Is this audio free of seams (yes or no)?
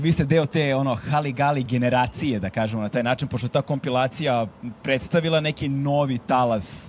yes